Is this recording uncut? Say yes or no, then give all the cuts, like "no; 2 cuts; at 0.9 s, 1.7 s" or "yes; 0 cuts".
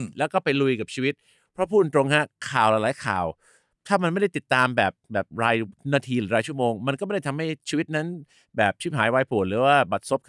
yes; 0 cuts